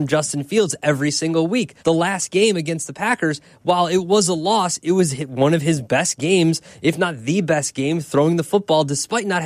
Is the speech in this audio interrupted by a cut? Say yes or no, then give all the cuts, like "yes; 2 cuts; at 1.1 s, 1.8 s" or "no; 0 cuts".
yes; 1 cut; at 1.8 s